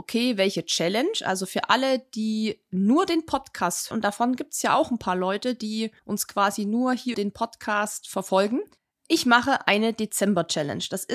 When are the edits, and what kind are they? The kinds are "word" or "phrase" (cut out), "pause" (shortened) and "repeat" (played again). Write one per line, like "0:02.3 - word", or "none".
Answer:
0:03.9 - word
0:06.0 - pause
0:07.1 - word
0:08.8 - pause